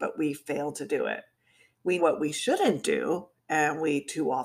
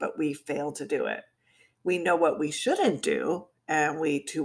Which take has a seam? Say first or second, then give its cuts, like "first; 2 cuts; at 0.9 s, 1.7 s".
first; 1 cut; at 2.0 s